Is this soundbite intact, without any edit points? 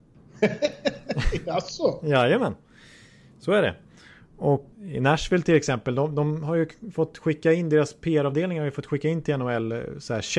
no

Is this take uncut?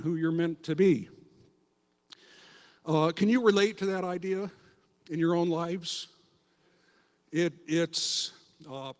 yes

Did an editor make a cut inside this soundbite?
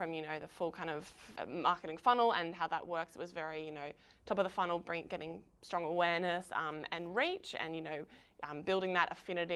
no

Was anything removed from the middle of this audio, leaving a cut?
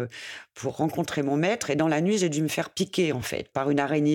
no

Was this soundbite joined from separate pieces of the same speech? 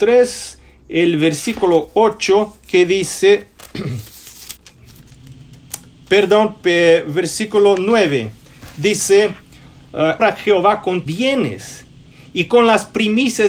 yes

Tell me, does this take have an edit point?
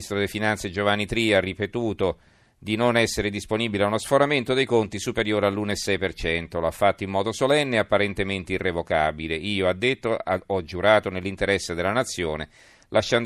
no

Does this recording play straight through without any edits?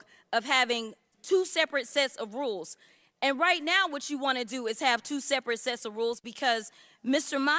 yes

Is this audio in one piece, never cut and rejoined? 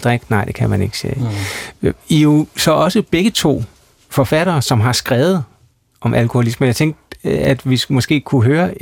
yes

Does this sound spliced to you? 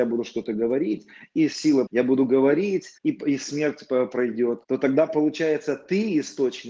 yes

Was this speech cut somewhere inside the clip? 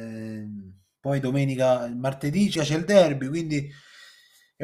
yes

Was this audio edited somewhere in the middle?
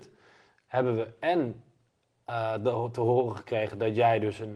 no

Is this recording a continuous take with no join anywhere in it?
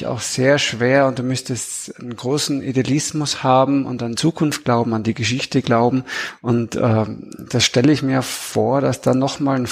no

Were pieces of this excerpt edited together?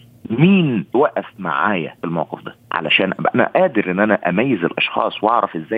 yes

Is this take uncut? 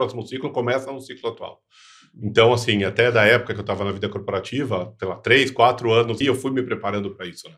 no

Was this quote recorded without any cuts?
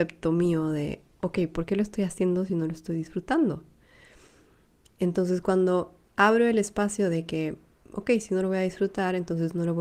yes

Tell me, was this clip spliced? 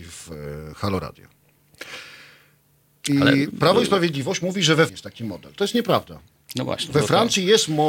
yes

